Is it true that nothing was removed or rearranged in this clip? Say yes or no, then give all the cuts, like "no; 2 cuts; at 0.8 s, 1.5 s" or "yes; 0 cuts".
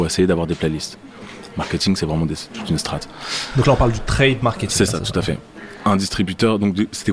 no; 1 cut; at 2.4 s